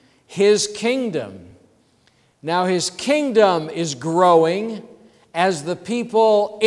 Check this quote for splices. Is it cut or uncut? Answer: uncut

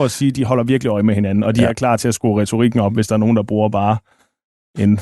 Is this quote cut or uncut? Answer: uncut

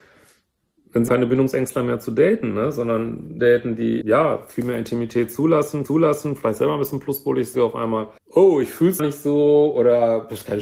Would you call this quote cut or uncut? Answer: cut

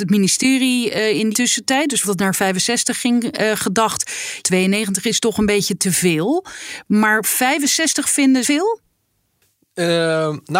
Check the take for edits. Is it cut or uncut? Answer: cut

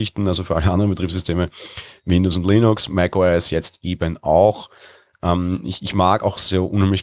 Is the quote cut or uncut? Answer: uncut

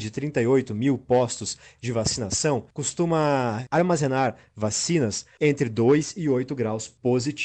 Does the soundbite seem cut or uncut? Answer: uncut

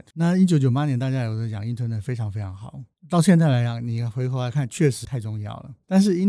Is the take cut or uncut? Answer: cut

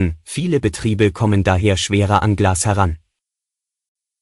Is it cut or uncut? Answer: uncut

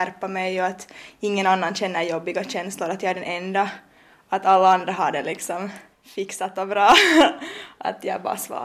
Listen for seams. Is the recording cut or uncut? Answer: cut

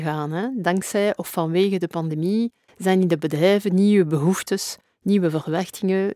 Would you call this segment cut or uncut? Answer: uncut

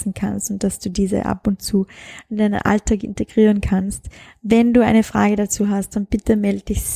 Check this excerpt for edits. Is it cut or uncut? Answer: uncut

